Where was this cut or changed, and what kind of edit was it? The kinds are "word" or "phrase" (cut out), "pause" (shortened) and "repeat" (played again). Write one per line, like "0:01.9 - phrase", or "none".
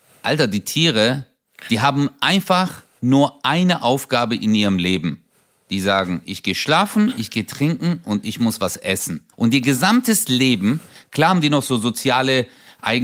0:09.3 - pause